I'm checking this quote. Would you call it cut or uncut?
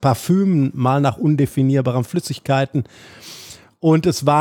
uncut